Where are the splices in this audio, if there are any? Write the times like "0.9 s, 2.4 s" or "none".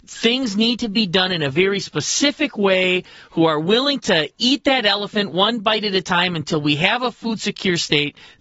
none